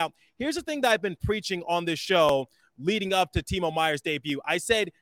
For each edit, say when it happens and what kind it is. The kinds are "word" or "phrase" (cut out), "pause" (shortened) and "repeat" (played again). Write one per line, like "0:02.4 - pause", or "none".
none